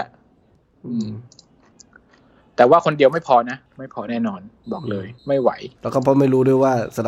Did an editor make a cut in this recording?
yes; 3 cuts; at 3.7 s, 5.2 s, 5.8 s

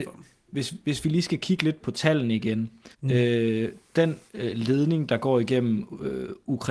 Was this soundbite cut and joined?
yes; 3 cuts; at 1.8 s, 2.9 s, 4.3 s

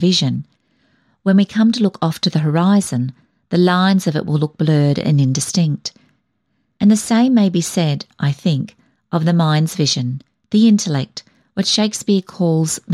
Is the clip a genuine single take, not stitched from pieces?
yes; 0 cuts

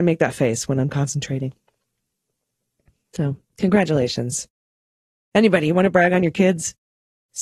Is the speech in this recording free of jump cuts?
no; 1 cut; at 3.5 s

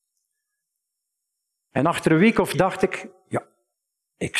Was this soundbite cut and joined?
yes; 1 cut; at 2.5 s

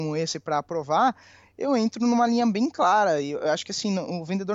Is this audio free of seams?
yes; 0 cuts

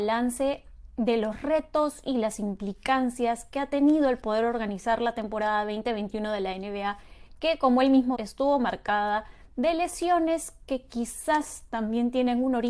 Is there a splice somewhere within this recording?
yes; 1 cut; at 8.1 s

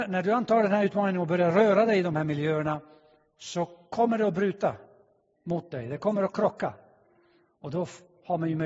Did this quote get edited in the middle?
no; 0 cuts

